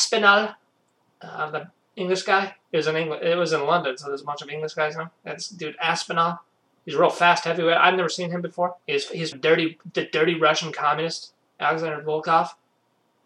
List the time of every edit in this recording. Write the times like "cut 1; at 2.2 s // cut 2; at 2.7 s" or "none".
cut 1; at 2.6 s // cut 2; at 6.6 s // cut 3; at 8.8 s // cut 4; at 9.3 s